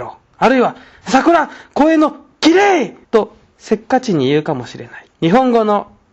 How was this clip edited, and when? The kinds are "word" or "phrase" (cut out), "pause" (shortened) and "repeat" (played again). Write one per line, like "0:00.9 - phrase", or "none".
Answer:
0:03.0 - pause
0:05.1 - pause